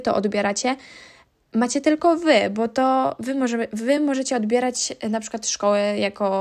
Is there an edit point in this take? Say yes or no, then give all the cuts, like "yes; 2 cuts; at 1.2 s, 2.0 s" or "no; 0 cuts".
no; 0 cuts